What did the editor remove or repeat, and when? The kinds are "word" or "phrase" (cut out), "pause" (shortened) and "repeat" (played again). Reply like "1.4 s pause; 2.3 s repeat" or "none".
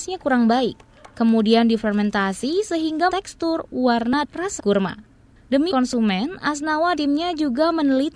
3.1 s word; 4.2 s word; 4.6 s word; 5.7 s word; 7.0 s word